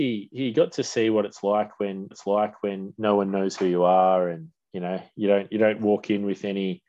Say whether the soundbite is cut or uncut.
cut